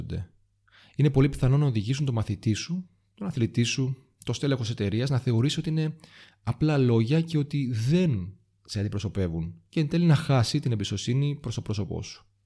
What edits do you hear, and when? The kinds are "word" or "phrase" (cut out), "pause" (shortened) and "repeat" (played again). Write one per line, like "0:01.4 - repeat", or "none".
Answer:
none